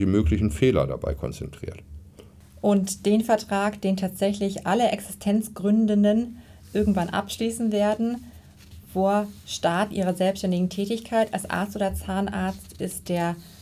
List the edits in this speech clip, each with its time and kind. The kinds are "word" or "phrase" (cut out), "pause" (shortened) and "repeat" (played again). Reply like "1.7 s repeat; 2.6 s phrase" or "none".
none